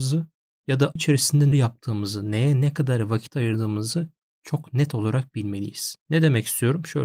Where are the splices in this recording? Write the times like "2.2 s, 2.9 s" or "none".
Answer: 1.0 s, 1.5 s